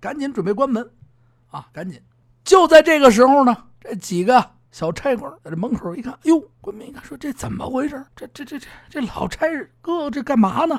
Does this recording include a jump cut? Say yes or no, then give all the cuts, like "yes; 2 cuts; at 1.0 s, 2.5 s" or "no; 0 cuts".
yes; 6 cuts; at 2.2 s, 3.7 s, 4.7 s, 5.4 s, 6.5 s, 8.1 s